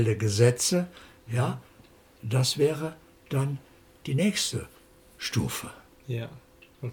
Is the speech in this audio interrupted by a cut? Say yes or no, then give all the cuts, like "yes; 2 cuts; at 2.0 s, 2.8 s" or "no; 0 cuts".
no; 0 cuts